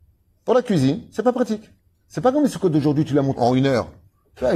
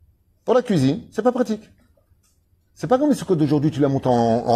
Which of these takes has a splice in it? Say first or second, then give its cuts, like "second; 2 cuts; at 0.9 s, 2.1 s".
first; 2 cuts; at 1.8 s, 3.4 s